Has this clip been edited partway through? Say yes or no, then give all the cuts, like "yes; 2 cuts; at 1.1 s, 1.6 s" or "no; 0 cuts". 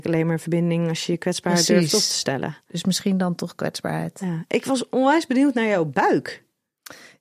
no; 0 cuts